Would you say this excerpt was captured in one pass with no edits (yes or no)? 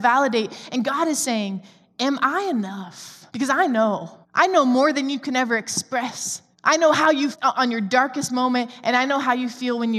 no